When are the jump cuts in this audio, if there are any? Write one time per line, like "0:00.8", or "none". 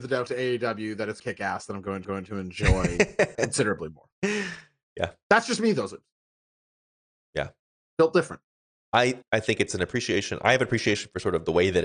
0:01.2
0:02.0
0:03.3
0:09.2